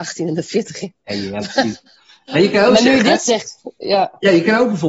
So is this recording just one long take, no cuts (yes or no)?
no